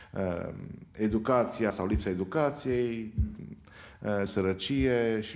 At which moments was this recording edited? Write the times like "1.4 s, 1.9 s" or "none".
1.7 s, 4.3 s